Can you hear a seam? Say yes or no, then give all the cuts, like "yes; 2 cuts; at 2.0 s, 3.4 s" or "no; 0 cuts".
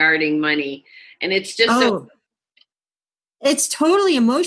no; 0 cuts